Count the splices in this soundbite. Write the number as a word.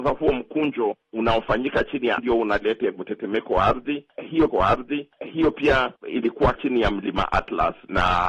four